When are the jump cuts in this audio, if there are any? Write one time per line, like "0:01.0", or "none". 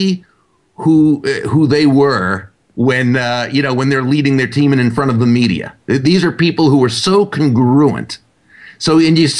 0:05.8